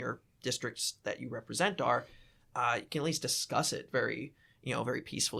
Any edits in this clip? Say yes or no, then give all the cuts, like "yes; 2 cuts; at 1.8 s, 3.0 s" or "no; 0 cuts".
no; 0 cuts